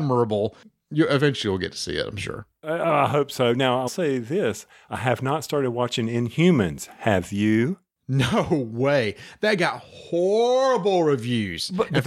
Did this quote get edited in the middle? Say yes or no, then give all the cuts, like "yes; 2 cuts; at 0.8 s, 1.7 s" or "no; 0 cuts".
yes; 1 cut; at 3.9 s